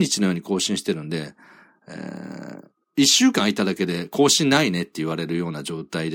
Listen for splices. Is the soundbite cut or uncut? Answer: uncut